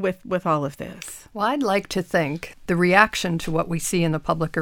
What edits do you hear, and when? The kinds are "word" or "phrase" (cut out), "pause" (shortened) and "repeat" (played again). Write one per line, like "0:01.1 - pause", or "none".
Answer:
0:02.5 - word